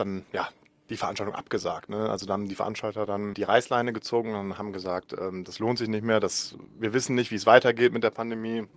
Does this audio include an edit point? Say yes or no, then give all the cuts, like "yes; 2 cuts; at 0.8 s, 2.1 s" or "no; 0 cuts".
no; 0 cuts